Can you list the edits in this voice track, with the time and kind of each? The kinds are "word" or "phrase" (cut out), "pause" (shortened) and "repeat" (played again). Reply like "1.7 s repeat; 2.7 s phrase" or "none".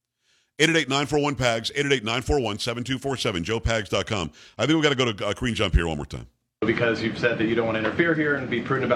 none